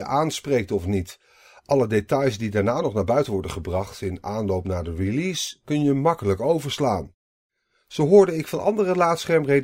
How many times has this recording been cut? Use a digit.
0